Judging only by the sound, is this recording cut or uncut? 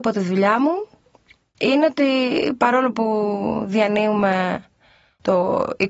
uncut